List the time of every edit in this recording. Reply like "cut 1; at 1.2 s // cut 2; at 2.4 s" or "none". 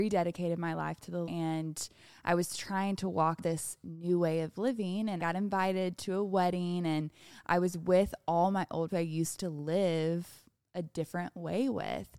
cut 1; at 1.3 s // cut 2; at 3.4 s // cut 3; at 5.2 s // cut 4; at 8.9 s